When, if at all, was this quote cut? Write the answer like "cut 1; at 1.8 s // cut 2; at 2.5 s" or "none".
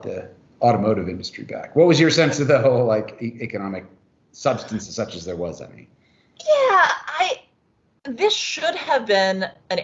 none